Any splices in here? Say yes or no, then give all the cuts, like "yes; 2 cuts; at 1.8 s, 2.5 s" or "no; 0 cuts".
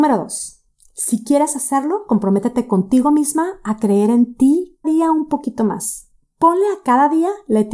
yes; 1 cut; at 4.8 s